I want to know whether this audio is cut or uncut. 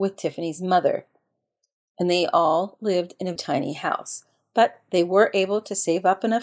cut